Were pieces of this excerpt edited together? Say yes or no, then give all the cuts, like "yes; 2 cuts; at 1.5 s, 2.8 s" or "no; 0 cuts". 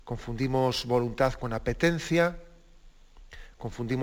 no; 0 cuts